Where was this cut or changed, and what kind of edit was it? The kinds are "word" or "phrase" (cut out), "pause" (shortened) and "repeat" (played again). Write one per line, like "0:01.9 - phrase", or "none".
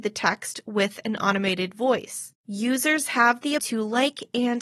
0:02.4 - pause
0:03.6 - word